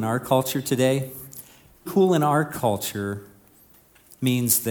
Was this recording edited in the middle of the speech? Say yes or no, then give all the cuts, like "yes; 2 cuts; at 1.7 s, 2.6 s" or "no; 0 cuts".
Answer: yes; 1 cut; at 1.9 s